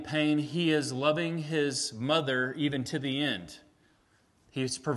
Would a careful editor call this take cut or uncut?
uncut